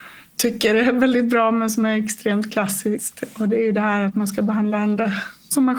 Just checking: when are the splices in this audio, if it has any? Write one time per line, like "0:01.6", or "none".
none